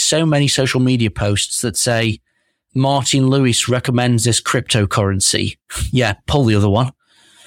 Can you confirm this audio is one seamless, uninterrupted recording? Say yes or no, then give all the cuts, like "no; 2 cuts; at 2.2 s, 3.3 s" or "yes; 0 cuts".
no; 1 cut; at 5.6 s